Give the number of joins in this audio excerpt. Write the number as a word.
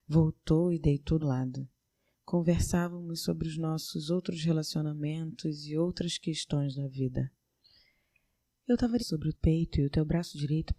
three